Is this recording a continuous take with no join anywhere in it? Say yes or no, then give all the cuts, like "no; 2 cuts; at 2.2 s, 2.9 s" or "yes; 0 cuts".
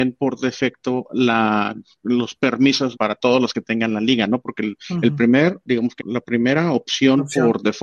no; 3 cuts; at 2.9 s, 5.7 s, 6.0 s